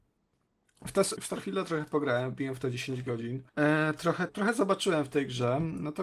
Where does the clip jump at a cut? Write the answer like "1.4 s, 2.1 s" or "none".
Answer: 1.2 s, 3.5 s, 4.3 s